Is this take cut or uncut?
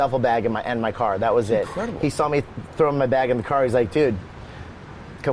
uncut